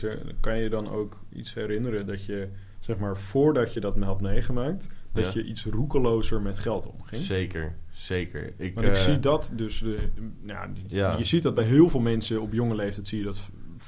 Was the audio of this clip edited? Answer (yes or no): no